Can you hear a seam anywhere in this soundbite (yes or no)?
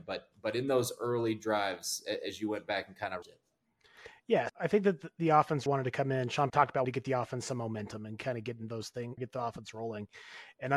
yes